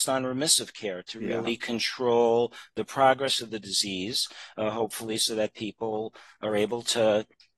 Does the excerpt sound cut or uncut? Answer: uncut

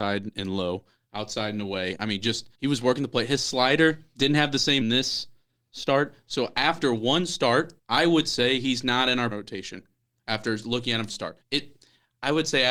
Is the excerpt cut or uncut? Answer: cut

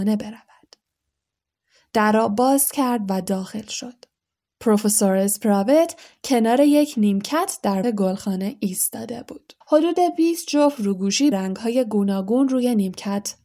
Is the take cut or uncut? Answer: cut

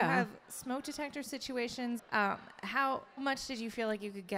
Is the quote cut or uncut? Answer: cut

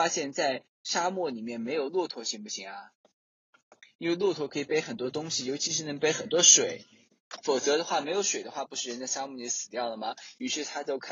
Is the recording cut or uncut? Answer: uncut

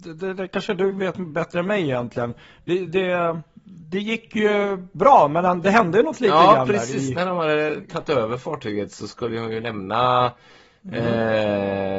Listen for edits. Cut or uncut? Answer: uncut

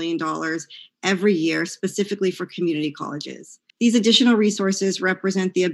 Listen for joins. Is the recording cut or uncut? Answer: cut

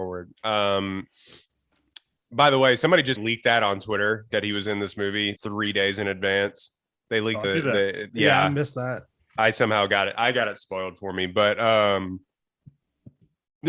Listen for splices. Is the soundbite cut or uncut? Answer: cut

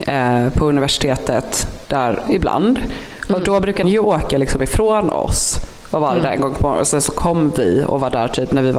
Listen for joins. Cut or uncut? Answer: cut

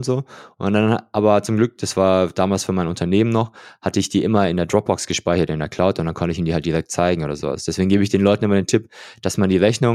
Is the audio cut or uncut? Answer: uncut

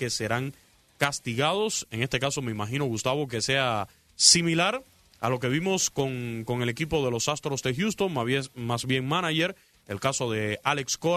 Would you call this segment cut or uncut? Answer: uncut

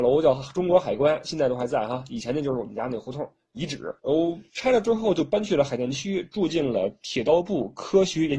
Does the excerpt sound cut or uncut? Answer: cut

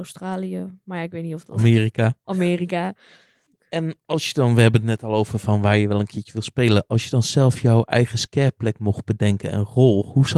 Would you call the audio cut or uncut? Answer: uncut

